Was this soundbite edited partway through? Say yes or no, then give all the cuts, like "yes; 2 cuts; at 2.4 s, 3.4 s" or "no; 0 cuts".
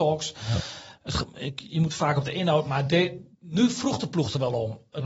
yes; 1 cut; at 3.3 s